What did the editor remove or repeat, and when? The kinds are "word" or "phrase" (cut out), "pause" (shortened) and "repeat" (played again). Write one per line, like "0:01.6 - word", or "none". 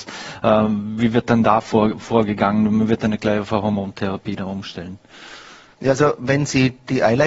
0:05.7 - pause